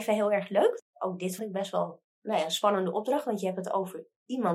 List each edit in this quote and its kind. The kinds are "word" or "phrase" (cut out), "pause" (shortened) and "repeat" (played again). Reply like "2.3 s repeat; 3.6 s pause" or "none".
1.4 s word; 2.1 s pause

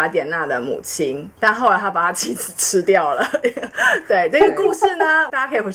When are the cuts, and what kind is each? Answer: 1.3 s pause

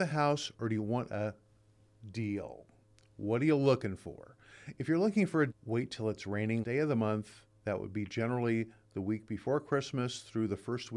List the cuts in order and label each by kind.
5.5 s word; 6.6 s word

